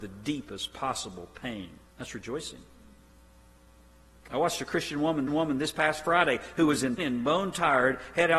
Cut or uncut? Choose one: cut